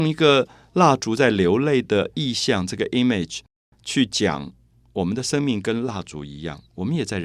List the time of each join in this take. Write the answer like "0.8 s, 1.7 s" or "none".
none